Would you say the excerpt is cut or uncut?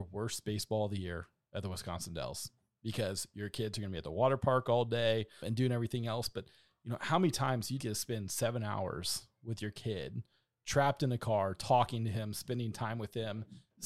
cut